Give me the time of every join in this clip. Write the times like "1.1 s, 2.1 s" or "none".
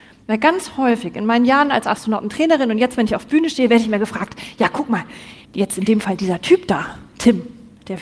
5.4 s